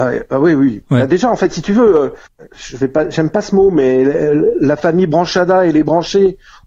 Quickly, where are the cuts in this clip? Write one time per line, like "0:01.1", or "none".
none